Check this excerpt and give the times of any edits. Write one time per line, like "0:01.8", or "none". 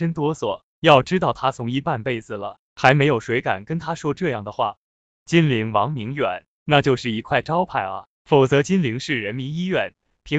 none